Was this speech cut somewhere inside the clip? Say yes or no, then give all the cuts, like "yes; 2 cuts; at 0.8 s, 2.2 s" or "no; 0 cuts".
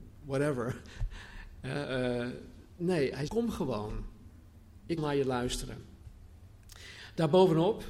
yes; 2 cuts; at 3.3 s, 5.0 s